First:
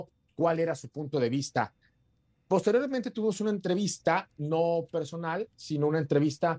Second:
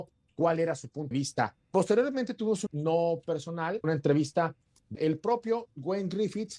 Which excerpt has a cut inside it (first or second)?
second